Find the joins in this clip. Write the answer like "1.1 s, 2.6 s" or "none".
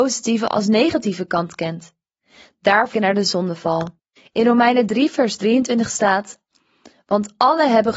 2.9 s, 4.0 s